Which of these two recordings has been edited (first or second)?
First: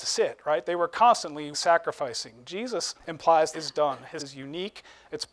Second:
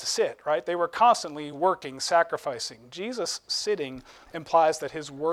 first